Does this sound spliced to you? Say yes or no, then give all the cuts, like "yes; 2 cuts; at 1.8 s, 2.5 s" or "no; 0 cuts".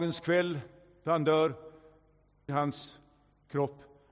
yes; 1 cut; at 2.5 s